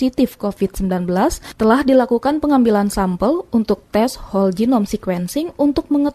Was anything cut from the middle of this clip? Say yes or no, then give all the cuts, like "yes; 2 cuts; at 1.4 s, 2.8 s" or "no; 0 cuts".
no; 0 cuts